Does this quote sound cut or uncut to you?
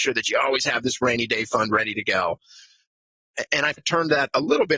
cut